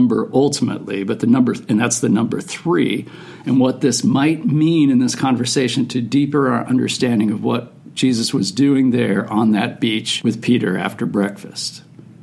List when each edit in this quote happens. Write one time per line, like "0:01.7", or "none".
none